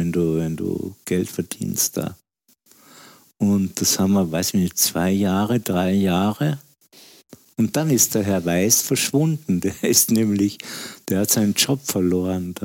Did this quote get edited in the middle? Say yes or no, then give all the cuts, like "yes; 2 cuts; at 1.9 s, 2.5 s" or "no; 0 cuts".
no; 0 cuts